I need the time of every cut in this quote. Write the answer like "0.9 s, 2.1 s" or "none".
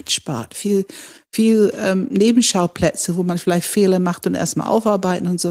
none

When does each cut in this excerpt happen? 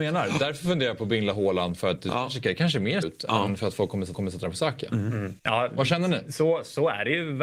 3.0 s, 4.1 s, 5.4 s

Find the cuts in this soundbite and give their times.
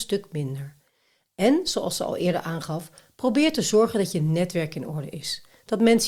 none

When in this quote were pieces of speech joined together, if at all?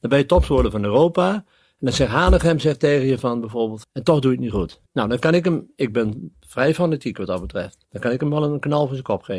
3.8 s, 4.9 s, 7.8 s

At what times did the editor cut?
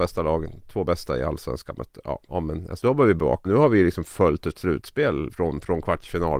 2.3 s, 2.8 s, 3.4 s, 5.3 s

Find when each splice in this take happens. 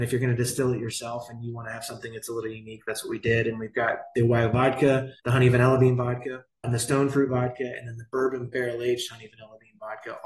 5.2 s, 6.6 s

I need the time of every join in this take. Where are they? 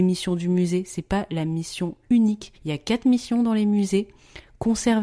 2.6 s

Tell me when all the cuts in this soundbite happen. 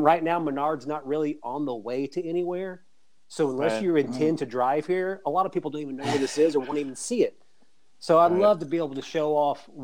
none

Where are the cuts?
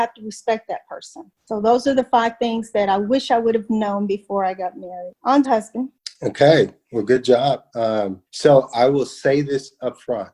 5.4 s, 8.3 s

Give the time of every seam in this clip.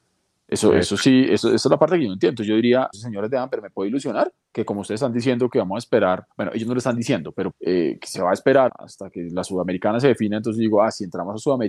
2.9 s, 4.4 s, 6.3 s, 7.5 s, 8.7 s

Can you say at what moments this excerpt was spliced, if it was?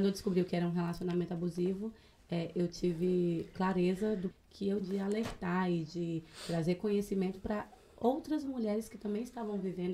4.3 s, 4.8 s

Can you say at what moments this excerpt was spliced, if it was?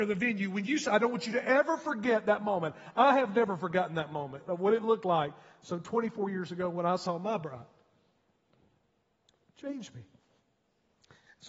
none

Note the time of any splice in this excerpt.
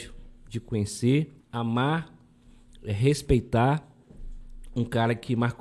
1.4 s

